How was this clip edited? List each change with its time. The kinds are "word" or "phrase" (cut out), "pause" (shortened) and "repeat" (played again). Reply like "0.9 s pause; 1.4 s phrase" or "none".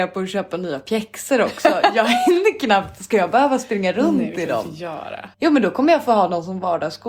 5.3 s pause